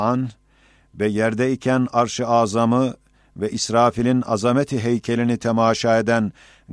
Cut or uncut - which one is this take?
uncut